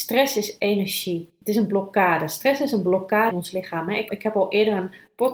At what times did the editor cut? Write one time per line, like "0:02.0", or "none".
0:03.3
0:04.1

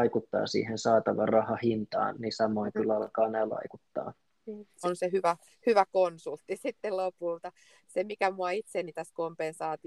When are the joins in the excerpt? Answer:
0:02.1
0:03.5
0:04.8

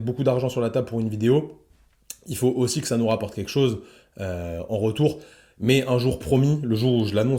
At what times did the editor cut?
none

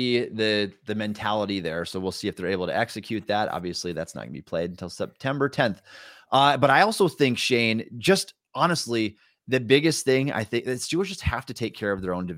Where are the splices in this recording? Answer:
none

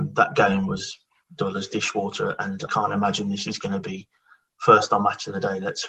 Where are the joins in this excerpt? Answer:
0:02.7

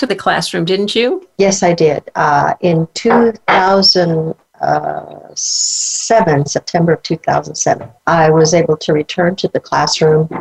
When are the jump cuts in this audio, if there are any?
0:08.0

